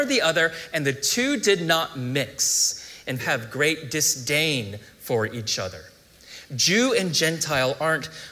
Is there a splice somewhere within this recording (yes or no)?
yes